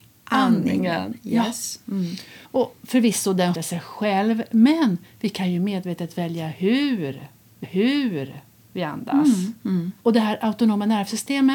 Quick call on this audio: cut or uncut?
cut